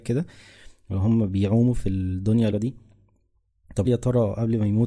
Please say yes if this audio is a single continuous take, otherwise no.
no